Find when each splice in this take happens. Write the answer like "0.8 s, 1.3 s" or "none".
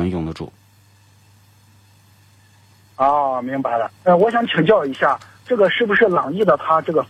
4.0 s